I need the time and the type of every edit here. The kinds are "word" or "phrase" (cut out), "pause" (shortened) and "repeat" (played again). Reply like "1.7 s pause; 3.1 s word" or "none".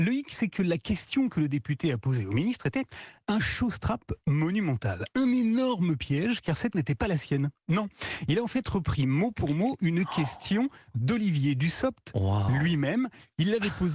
6.7 s word